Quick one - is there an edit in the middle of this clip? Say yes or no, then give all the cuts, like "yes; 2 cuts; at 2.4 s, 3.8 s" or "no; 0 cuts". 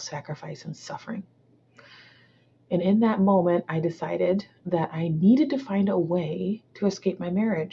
no; 0 cuts